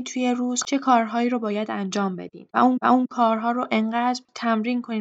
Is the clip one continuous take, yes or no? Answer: no